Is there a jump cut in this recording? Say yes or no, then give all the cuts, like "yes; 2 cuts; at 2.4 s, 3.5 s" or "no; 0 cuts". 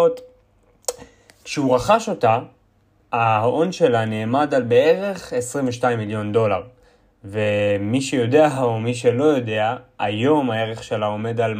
no; 0 cuts